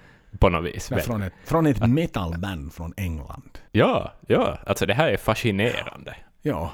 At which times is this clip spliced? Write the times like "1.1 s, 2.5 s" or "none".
3.7 s